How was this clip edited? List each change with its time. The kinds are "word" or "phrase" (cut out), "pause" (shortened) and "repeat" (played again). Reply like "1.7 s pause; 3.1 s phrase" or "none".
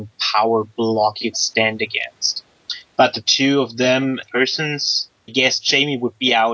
1.3 s word; 4.2 s word; 5.3 s word

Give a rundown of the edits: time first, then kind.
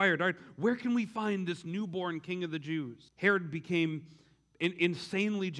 3.1 s pause

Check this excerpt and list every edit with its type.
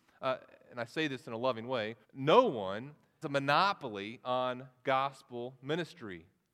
2.0 s pause; 3.2 s word

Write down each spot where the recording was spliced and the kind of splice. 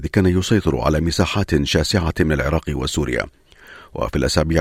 none

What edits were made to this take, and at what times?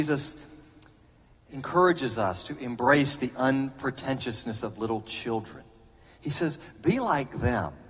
none

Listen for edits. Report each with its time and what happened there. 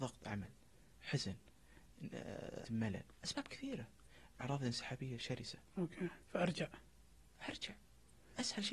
2.6 s word; 3.1 s pause; 4.4 s word; 6.2 s pause

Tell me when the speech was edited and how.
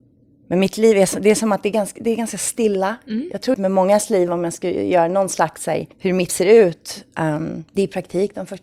3.5 s word; 5.9 s pause; 6.3 s word; 7.7 s pause

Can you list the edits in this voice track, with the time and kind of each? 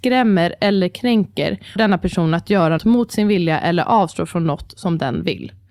1.8 s word; 2.8 s word

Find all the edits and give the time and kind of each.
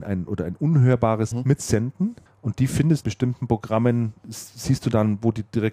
1.3 s word; 2.3 s pause; 3.0 s phrase

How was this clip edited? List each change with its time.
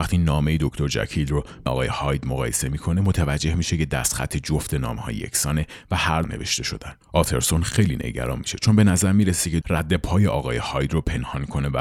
1.7 s word; 6.2 s phrase; 9.6 s phrase

